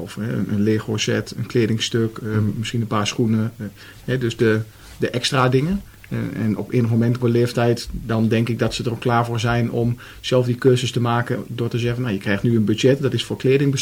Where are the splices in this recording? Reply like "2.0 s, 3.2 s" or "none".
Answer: 1.3 s, 7.2 s